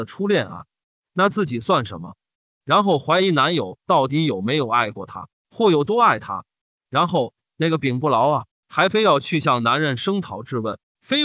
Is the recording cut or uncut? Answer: uncut